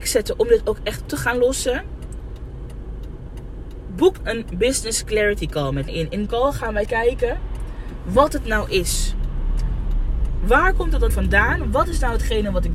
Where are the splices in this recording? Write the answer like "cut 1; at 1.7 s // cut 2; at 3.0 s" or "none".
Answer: cut 1; at 1.1 s // cut 2; at 4.2 s // cut 3; at 5.9 s // cut 4; at 6.3 s // cut 5; at 6.9 s // cut 6; at 11.1 s